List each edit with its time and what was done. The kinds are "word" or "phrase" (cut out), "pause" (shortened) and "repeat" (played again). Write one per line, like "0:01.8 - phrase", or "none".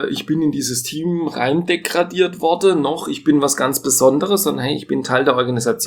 none